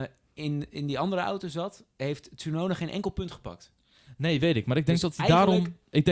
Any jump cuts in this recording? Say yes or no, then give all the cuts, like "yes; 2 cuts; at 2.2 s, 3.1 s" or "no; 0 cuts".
yes; 1 cut; at 1.9 s